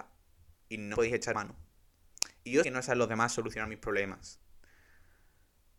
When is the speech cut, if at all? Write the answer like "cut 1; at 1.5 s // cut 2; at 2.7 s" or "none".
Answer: cut 1; at 0.9 s // cut 2; at 1.3 s // cut 3; at 2.6 s